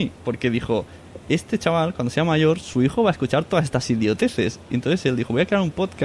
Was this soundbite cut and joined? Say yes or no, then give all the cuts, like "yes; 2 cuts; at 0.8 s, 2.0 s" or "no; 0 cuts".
no; 0 cuts